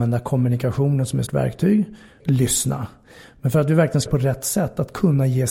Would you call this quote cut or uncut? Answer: cut